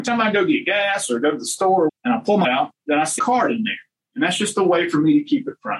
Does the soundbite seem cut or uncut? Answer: cut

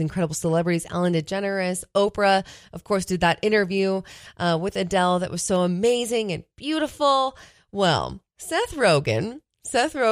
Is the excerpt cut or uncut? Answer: cut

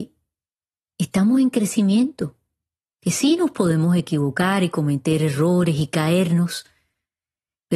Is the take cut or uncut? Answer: uncut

